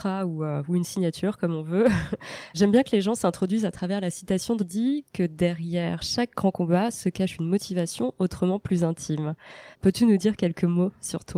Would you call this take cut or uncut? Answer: cut